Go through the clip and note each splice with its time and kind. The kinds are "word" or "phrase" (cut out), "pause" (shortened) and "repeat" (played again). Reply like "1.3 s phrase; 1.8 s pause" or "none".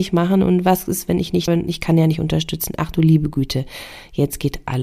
1.5 s word